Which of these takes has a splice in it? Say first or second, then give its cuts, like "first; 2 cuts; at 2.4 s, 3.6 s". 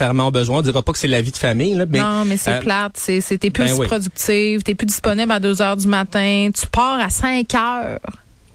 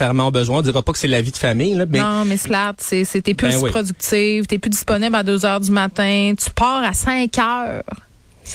second; 1 cut; at 2.4 s